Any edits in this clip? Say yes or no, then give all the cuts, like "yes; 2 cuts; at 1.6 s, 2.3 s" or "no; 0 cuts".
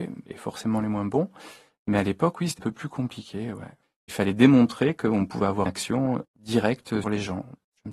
yes; 3 cuts; at 2.6 s, 5.7 s, 7.0 s